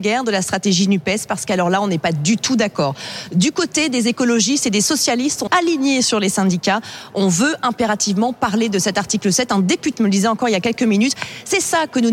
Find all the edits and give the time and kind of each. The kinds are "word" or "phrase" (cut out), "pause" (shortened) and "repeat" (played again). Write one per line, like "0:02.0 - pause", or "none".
0:05.5 - word
0:10.0 - word